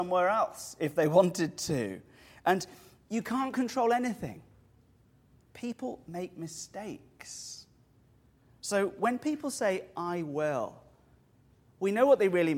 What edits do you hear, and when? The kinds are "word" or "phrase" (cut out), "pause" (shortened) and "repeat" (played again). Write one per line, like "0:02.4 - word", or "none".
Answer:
none